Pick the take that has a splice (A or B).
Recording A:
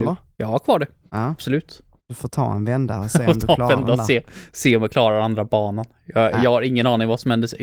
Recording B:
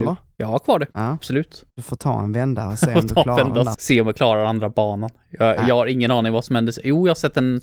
B